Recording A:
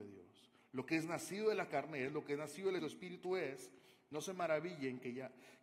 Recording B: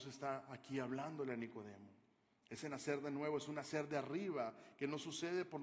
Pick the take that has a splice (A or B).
A